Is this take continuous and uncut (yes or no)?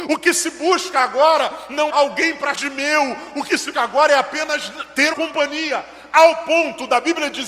no